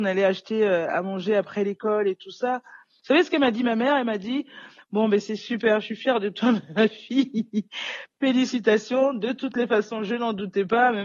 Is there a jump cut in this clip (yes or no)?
no